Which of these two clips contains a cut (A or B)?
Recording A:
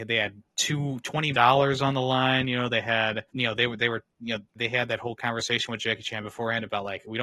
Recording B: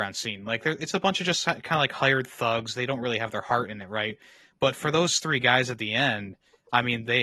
A